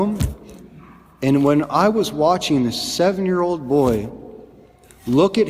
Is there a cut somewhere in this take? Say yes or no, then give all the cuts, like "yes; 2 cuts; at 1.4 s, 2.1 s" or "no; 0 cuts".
no; 0 cuts